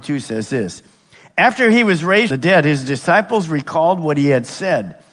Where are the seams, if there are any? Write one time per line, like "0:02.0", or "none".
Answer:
0:02.3